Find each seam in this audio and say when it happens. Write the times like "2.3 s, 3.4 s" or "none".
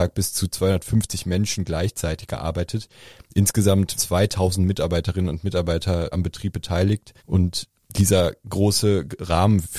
4.0 s, 6.1 s, 7.2 s